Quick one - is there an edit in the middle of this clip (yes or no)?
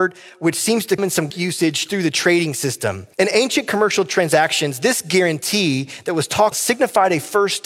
yes